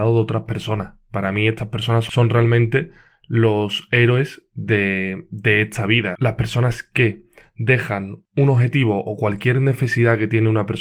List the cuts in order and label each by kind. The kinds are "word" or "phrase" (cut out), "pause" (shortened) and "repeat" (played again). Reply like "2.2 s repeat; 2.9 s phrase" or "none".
none

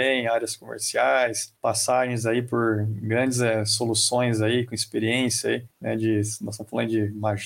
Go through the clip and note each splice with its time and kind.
1.6 s pause; 5.7 s pause

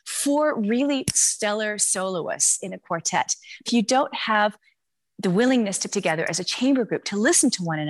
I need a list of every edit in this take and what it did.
3.7 s word; 5.9 s word

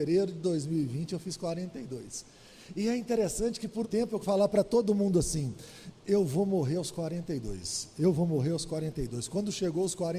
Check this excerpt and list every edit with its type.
3.8 s word; 4.2 s word

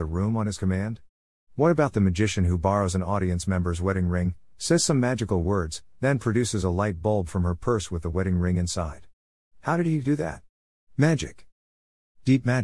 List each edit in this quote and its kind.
none

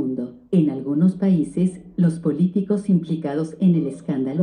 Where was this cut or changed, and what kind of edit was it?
none

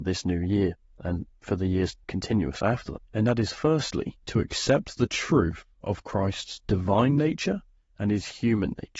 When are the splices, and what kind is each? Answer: 2.0 s pause; 3.1 s pause; 4.2 s pause

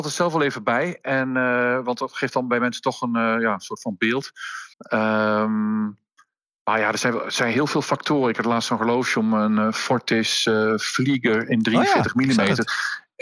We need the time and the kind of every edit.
4.7 s pause

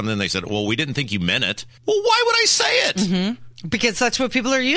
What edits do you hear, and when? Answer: 1.8 s pause

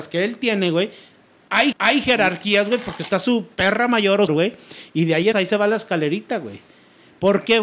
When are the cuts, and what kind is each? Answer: 1.7 s repeat; 4.3 s phrase; 5.3 s word

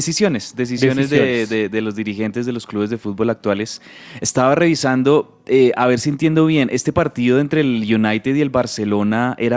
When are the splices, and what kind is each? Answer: none

